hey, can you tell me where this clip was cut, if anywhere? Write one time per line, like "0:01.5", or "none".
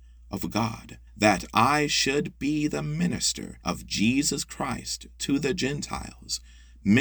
0:01.1
0:03.6